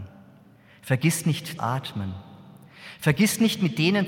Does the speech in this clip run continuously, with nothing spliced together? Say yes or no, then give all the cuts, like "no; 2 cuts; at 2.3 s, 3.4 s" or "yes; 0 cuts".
no; 1 cut; at 1.6 s